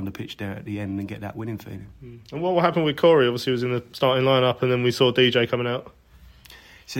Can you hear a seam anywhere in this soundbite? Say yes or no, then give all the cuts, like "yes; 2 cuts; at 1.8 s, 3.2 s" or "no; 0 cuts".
no; 0 cuts